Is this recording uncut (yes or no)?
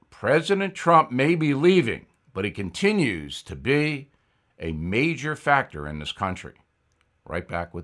yes